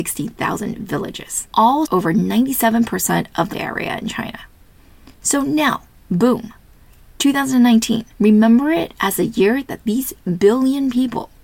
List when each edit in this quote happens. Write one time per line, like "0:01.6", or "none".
0:01.9
0:03.5
0:05.1
0:05.9
0:08.1